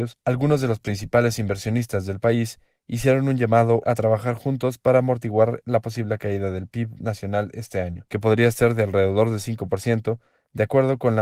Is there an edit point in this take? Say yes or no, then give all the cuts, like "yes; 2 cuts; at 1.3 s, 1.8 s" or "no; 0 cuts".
no; 0 cuts